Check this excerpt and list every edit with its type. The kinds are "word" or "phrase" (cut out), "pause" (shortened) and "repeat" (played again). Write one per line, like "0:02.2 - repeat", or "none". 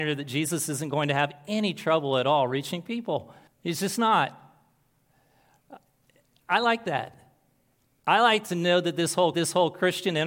0:03.5 - pause
0:09.3 - repeat